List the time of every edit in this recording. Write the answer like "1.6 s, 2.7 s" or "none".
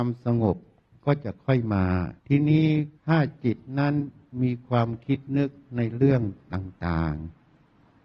2.2 s, 3.0 s